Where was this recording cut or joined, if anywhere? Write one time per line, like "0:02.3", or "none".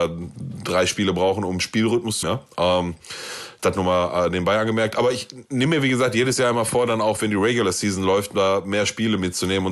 0:02.2